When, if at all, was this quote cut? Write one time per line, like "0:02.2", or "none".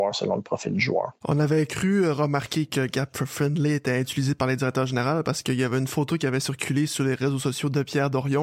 0:01.2